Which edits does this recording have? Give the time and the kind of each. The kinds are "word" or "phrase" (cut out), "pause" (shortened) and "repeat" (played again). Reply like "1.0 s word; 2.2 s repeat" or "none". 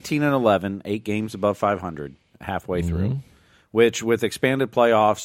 none